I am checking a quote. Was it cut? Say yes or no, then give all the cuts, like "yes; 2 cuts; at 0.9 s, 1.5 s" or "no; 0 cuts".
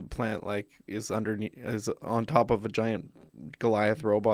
no; 0 cuts